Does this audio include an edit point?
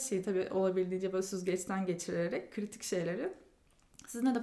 no; 0 cuts

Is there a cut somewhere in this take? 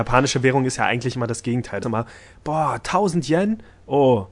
yes; 1 cut; at 1.8 s

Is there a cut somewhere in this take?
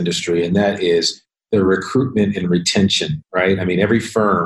no; 0 cuts

